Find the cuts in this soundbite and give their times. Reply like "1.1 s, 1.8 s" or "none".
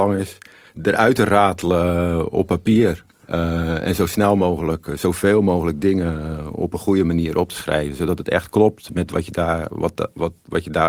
3.2 s

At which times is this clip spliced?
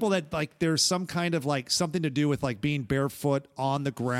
none

